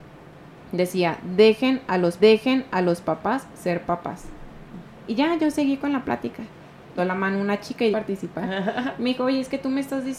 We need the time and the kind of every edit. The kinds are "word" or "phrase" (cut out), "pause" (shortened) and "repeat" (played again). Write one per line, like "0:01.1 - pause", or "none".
0:02.2 - repeat
0:04.9 - pause
0:07.0 - phrase
0:07.9 - phrase